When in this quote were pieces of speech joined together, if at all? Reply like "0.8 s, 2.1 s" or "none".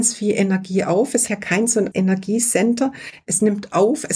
1.3 s, 1.9 s